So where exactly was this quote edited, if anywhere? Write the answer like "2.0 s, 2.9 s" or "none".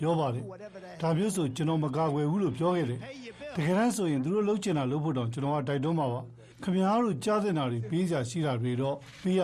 6.5 s